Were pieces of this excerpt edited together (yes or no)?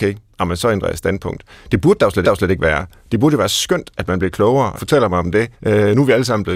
yes